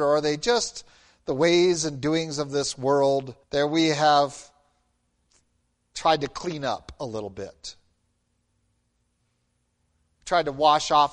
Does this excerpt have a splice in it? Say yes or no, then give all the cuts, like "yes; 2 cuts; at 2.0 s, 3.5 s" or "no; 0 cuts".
yes; 1 cut; at 3.4 s